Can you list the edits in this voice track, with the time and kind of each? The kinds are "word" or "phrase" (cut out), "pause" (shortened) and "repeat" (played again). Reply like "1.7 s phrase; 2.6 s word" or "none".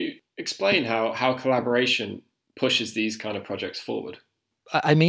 none